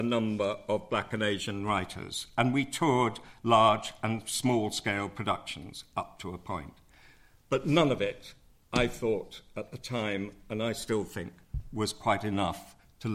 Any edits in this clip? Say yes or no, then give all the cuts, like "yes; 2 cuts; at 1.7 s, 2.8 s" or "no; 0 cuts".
no; 0 cuts